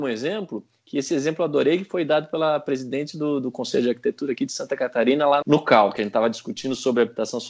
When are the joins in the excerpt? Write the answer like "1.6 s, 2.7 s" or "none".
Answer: 5.4 s